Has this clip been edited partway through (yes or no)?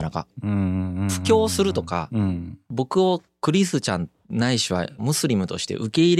yes